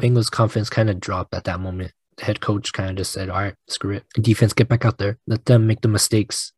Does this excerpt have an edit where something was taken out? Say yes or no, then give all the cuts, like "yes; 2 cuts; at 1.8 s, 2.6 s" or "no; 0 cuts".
yes; 3 cuts; at 3.6 s, 4.1 s, 5.2 s